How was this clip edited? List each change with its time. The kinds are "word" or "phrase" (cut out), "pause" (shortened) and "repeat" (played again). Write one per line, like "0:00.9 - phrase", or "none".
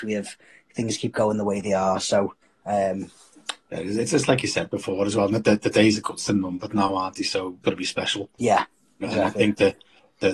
0:02.4 - pause
0:07.6 - word
0:08.3 - pause